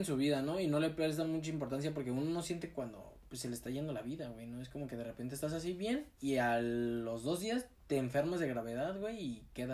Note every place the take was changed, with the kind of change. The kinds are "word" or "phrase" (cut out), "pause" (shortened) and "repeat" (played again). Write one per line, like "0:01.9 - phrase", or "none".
0:07.7 - pause